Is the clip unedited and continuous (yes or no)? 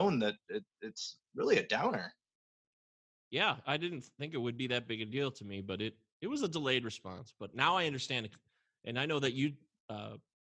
yes